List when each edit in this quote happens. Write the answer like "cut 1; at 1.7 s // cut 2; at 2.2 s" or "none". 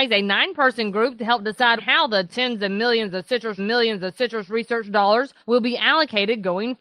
cut 1; at 1.8 s // cut 2; at 3.6 s // cut 3; at 5.4 s